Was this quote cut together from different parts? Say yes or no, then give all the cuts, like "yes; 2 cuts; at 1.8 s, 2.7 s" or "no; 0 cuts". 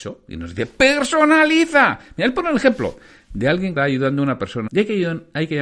yes; 2 cuts; at 3.8 s, 4.7 s